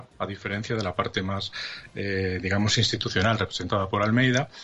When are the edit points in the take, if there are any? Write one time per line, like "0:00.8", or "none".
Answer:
none